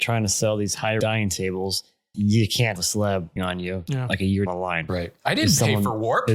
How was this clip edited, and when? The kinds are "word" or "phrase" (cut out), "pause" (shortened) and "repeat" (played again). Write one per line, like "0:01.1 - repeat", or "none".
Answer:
0:01.0 - word
0:02.1 - word
0:02.8 - word
0:03.4 - word
0:04.5 - word